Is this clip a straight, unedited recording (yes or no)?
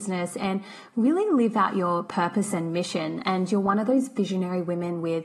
yes